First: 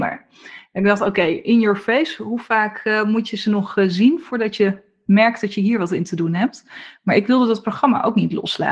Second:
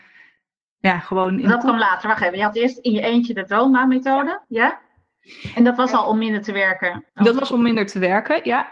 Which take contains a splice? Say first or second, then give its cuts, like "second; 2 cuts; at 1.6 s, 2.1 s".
second; 2 cuts; at 4.4 s, 7.1 s